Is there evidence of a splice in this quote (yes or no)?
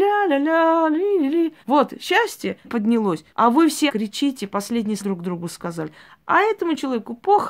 yes